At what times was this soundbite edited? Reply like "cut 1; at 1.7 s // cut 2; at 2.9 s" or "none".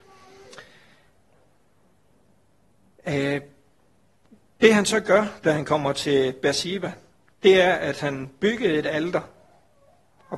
none